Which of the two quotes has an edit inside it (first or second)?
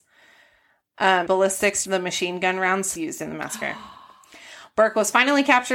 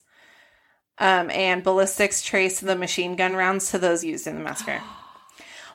first